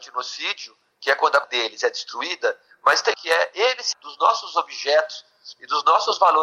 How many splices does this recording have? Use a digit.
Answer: 3